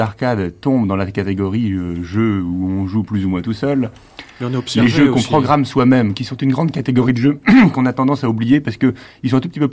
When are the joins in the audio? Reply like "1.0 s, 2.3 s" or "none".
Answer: none